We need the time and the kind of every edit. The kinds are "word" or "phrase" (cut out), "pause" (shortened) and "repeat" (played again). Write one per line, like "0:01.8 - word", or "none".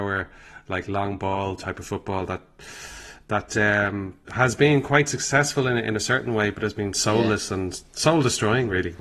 0:04.2 - pause